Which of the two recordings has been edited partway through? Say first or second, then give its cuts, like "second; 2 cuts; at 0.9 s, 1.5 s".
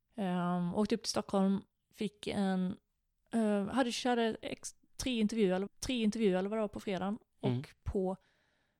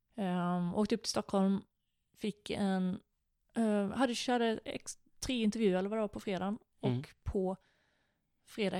first; 2 cuts; at 1.8 s, 5.7 s